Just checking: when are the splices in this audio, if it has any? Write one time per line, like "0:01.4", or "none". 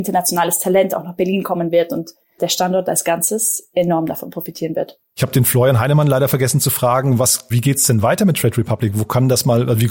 0:02.4
0:07.5